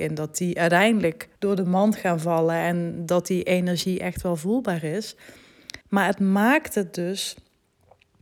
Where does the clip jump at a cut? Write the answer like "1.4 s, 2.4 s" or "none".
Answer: 1.4 s, 5.8 s